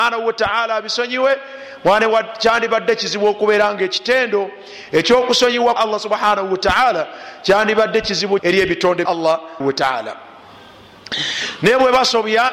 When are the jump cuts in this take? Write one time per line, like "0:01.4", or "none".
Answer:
0:05.8
0:08.4
0:09.0
0:09.6